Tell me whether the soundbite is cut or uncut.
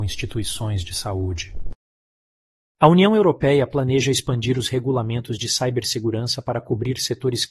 uncut